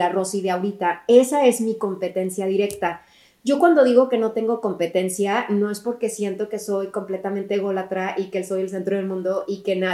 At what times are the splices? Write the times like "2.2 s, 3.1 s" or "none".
none